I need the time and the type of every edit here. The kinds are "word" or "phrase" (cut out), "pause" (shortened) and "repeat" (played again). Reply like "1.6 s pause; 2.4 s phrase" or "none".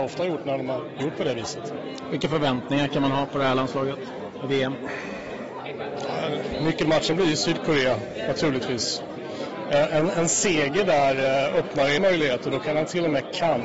12.0 s word